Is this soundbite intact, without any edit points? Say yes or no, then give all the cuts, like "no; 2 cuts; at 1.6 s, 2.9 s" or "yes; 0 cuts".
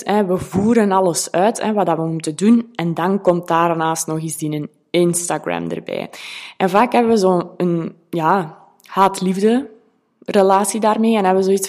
yes; 0 cuts